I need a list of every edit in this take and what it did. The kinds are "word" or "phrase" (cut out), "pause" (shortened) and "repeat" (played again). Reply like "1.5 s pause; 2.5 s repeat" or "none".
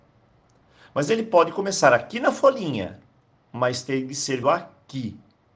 4.4 s word